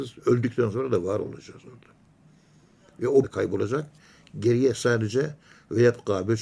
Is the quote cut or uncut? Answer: cut